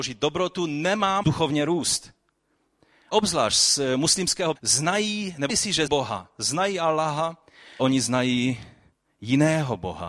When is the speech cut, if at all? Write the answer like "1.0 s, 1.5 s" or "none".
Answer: 1.2 s, 3.1 s, 4.6 s, 5.5 s, 5.9 s, 7.8 s